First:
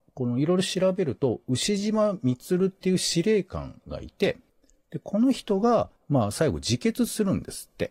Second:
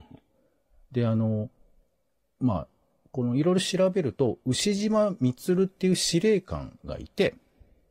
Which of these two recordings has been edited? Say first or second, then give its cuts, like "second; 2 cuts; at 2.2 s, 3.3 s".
first; 2 cuts; at 4.5 s, 6.0 s